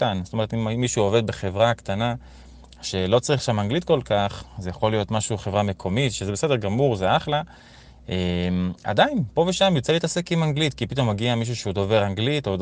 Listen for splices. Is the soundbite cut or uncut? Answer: uncut